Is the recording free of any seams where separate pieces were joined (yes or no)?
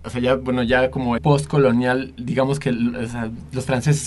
no